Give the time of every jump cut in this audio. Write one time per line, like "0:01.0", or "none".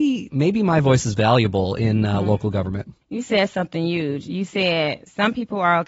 0:03.0